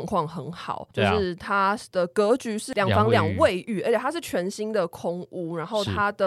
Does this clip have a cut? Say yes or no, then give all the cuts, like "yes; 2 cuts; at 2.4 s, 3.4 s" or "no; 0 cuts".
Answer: yes; 1 cut; at 0.9 s